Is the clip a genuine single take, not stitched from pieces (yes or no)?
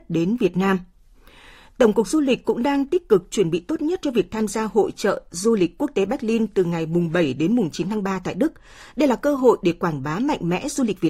yes